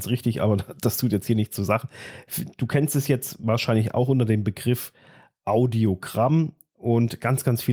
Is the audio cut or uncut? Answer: uncut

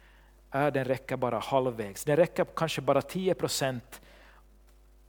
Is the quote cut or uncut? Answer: uncut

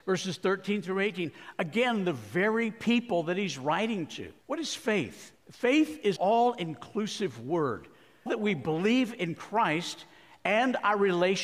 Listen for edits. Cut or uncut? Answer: cut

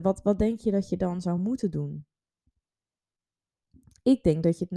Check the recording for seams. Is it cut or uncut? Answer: uncut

